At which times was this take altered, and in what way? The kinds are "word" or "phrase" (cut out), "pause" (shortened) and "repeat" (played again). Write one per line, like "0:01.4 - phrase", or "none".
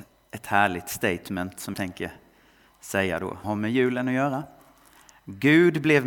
0:01.7 - word
0:03.4 - word